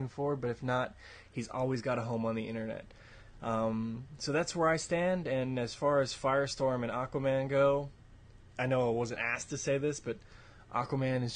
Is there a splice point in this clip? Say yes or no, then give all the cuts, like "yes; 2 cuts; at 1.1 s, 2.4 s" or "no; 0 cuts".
no; 0 cuts